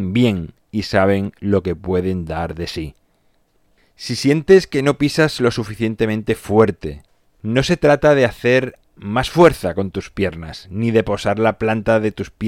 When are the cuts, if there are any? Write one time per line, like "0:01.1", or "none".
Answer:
none